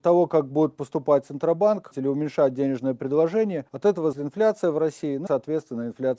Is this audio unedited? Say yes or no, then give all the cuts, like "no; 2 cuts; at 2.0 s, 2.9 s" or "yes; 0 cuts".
no; 4 cuts; at 1.9 s, 3.7 s, 4.1 s, 5.3 s